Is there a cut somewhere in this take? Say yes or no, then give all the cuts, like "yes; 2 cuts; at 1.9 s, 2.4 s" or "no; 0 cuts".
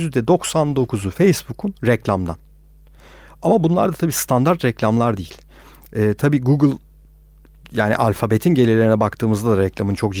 no; 0 cuts